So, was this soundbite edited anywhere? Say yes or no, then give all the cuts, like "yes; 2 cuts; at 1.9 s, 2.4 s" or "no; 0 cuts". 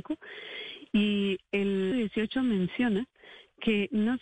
yes; 1 cut; at 1.9 s